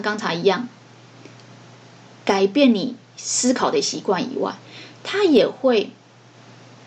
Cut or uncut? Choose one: uncut